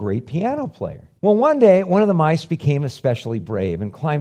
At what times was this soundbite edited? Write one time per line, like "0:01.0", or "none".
0:01.2